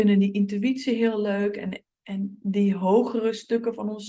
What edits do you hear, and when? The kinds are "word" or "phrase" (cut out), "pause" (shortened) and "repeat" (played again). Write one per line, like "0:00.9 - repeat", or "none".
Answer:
0:02.4 - word